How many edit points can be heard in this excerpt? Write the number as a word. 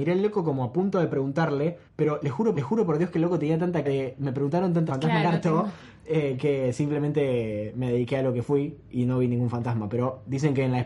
five